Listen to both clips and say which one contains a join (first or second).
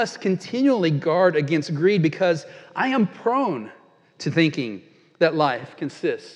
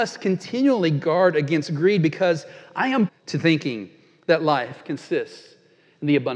second